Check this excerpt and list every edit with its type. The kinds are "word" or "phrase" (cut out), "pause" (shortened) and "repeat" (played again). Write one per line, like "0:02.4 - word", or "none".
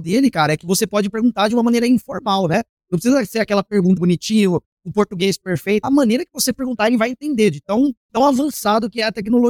0:04.0 - word
0:05.8 - word
0:08.1 - word